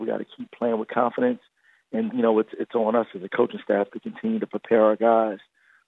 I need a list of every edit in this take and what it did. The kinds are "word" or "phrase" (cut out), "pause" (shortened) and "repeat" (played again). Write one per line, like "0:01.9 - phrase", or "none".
0:02.1 - word